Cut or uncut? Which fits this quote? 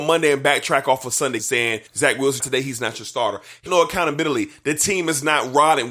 cut